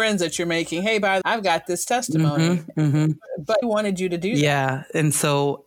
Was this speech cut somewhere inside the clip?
yes; 2 cuts; at 1.2 s, 3.6 s

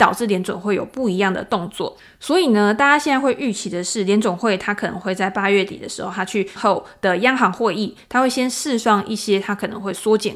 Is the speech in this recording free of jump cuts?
no; 1 cut; at 6.6 s

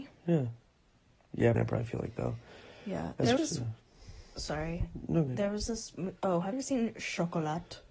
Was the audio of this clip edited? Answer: yes; 4 cuts; at 1.5 s, 3.4 s, 5.3 s, 6.5 s

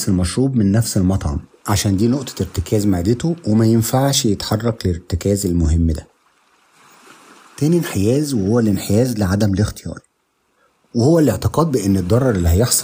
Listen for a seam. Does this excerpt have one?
no; 0 cuts

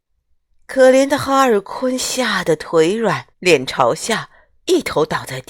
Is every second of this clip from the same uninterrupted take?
no; 1 cut; at 3.3 s

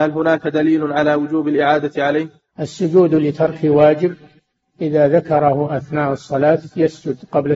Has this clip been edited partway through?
no; 0 cuts

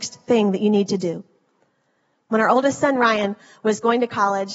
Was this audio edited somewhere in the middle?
no; 0 cuts

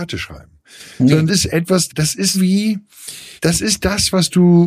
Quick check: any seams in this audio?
yes; 4 cuts; at 1.3 s, 1.9 s, 2.3 s, 3.4 s

